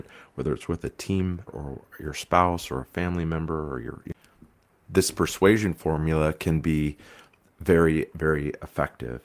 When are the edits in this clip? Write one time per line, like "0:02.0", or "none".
0:01.5